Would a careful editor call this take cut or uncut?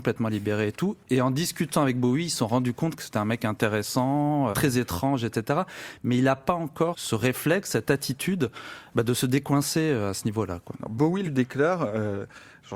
cut